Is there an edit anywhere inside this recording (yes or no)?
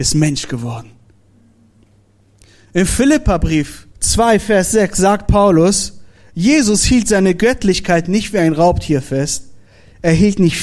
yes